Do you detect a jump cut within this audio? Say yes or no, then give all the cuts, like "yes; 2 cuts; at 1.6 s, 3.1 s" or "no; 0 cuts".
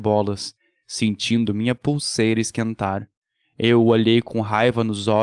no; 0 cuts